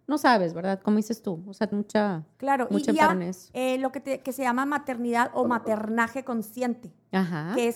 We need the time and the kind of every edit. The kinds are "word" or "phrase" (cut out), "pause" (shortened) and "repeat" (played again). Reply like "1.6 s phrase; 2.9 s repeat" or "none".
1.7 s word; 2.3 s pause; 3.1 s word